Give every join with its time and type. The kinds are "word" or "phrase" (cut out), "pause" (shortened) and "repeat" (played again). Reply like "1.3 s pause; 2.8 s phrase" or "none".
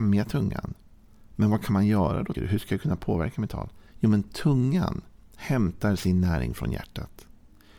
2.3 s word; 3.9 s pause

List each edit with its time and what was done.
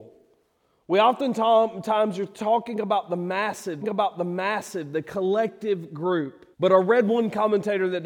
3.8 s repeat; 6.5 s pause

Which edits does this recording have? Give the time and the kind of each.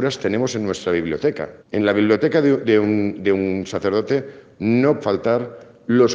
1.6 s pause; 5.0 s word

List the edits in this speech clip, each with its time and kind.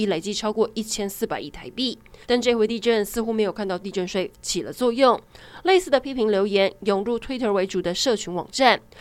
2.2 s pause

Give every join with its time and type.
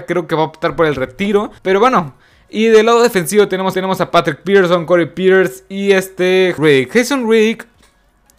1.6 s pause; 3.7 s repeat; 6.6 s word

